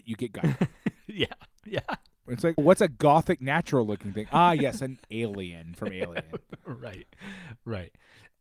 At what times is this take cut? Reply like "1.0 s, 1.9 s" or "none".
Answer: 2.6 s